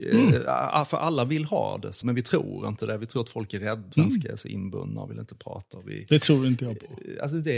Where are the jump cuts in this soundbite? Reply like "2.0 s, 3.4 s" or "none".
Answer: 2.0 s, 3.9 s